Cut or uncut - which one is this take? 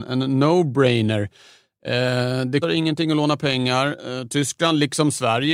cut